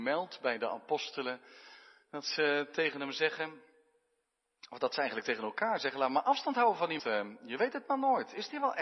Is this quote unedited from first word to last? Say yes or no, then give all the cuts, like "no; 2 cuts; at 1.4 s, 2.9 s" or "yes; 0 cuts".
no; 1 cut; at 7.0 s